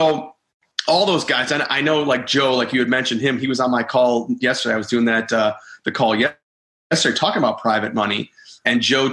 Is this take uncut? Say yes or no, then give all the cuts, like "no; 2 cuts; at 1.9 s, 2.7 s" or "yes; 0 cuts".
yes; 0 cuts